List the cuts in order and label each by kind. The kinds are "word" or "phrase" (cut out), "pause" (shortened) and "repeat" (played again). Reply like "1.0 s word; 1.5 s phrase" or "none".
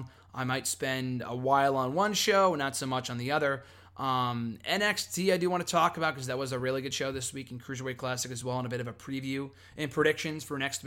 none